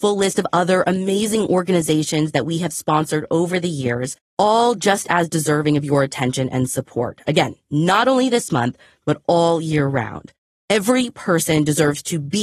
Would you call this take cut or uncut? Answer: uncut